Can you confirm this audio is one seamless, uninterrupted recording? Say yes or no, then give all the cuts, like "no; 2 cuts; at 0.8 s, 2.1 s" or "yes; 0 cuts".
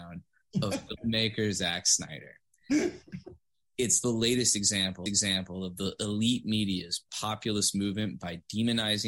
no; 2 cuts; at 5.1 s, 7.1 s